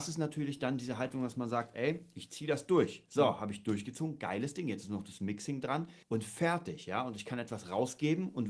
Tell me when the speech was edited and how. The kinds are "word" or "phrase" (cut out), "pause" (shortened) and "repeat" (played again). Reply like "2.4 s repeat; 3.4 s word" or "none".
6.0 s pause